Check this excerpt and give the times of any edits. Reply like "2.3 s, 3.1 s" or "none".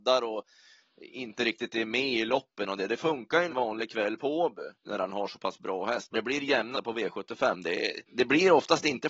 3.5 s, 4.7 s, 6.1 s, 6.7 s, 8.1 s

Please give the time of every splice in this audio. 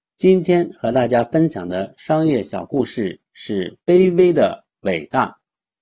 3.8 s, 4.7 s

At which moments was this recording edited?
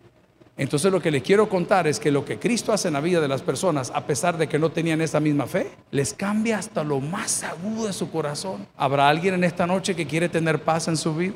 5.8 s, 8.7 s

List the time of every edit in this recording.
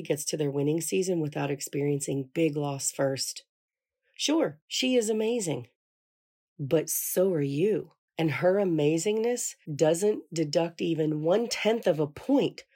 8.0 s, 9.6 s

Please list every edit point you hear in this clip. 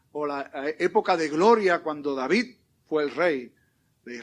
none

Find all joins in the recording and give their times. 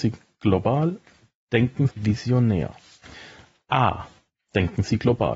1.9 s

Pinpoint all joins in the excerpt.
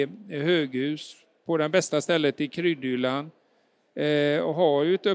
none

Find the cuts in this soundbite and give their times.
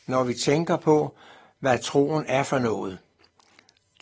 none

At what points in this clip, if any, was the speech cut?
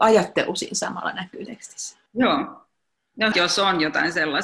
1.5 s, 2.1 s, 3.3 s

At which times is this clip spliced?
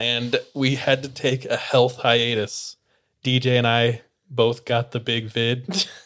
none

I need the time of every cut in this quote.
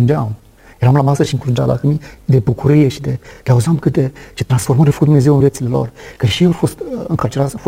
none

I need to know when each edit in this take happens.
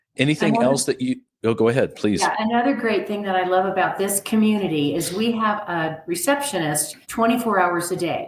7.0 s

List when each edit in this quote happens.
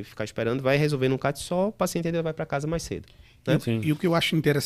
none

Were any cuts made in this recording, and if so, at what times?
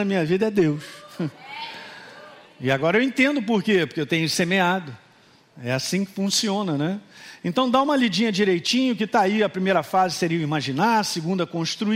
none

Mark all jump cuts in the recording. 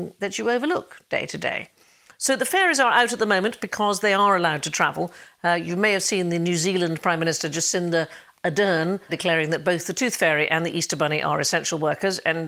9.1 s

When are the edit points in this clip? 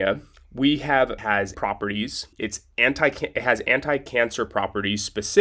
1.2 s, 1.5 s, 2.3 s

